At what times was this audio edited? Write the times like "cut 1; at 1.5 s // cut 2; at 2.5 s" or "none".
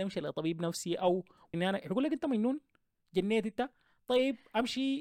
cut 1; at 1.5 s